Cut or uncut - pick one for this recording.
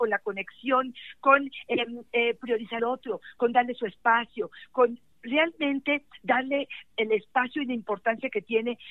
cut